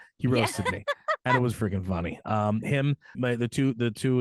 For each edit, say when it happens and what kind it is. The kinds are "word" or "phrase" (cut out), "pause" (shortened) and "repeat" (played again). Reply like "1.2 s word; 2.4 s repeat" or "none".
1.5 s word; 3.1 s word